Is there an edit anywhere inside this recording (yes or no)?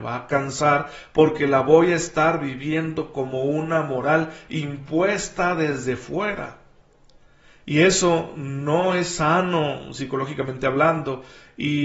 no